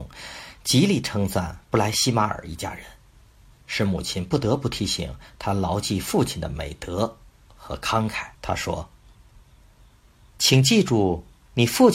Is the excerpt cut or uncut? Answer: cut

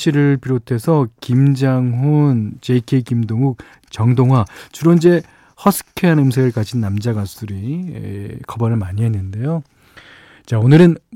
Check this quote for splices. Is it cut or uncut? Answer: uncut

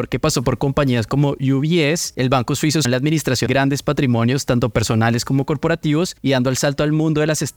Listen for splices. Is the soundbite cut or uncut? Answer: cut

